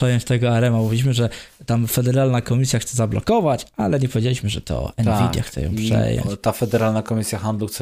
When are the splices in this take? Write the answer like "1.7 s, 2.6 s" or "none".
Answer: none